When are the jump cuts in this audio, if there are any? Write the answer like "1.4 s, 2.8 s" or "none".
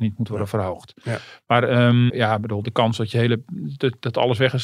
2.1 s